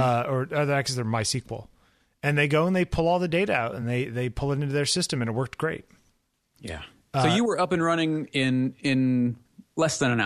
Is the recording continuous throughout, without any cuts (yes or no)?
yes